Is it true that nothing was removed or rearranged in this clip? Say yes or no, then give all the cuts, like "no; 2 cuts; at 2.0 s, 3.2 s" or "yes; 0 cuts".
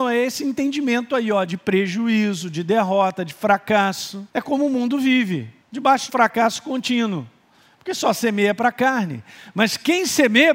no; 3 cuts; at 4.3 s, 5.6 s, 6.1 s